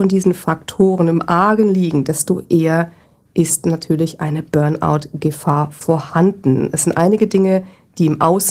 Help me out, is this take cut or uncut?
uncut